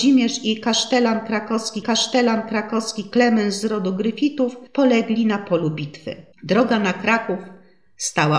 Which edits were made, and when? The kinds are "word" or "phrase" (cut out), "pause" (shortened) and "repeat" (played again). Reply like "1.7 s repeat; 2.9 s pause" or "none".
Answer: 1.8 s repeat; 4.7 s pause; 6.3 s pause